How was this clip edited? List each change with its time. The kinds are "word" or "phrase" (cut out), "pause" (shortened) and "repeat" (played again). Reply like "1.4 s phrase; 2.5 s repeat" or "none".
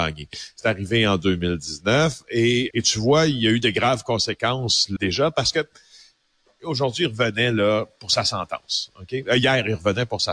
2.7 s word; 5.0 s word